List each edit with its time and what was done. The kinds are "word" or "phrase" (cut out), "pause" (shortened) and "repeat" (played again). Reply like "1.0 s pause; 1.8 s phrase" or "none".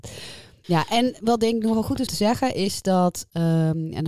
2.1 s word